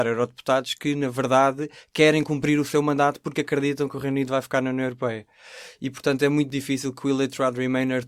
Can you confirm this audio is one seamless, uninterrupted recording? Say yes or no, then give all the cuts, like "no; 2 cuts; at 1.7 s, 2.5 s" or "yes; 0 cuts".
yes; 0 cuts